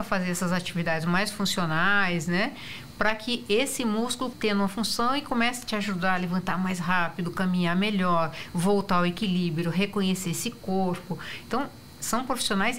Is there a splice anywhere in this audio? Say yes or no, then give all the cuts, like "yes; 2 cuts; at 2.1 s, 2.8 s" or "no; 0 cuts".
yes; 1 cut; at 4.3 s